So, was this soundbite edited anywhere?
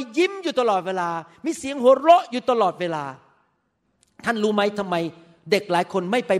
no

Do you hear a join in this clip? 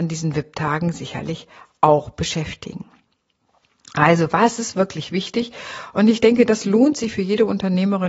no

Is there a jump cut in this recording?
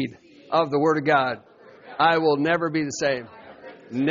no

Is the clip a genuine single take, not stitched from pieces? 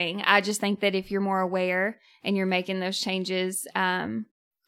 yes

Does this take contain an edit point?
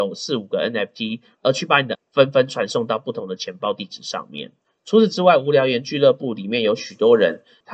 yes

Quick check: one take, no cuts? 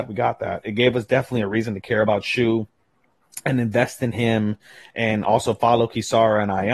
yes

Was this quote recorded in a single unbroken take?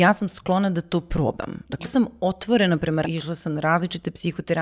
no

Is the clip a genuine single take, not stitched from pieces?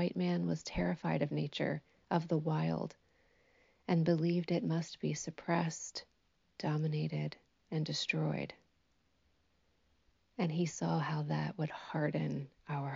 yes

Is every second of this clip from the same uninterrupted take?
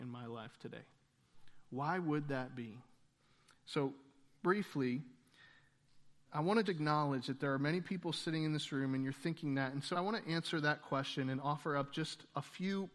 no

